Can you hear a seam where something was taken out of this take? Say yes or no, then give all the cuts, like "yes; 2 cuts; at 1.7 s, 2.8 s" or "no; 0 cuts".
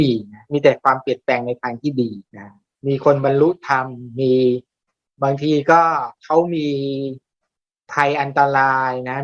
yes; 1 cut; at 2.3 s